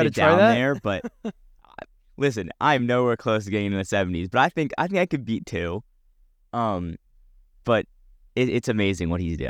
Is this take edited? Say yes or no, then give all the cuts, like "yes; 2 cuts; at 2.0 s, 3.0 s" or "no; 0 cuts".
no; 0 cuts